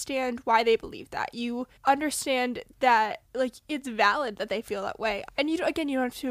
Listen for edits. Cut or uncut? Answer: cut